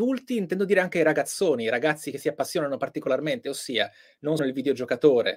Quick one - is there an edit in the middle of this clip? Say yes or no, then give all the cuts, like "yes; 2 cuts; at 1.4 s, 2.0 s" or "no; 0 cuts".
yes; 1 cut; at 4.4 s